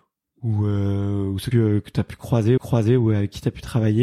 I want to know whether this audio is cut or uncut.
cut